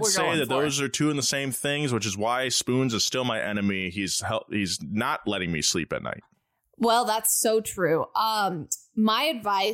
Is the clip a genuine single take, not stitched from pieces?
yes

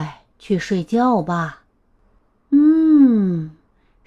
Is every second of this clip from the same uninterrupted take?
yes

